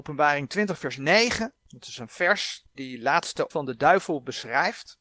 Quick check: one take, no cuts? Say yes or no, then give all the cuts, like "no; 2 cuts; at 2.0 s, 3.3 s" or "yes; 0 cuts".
no; 3 cuts; at 1.6 s, 2.7 s, 3.5 s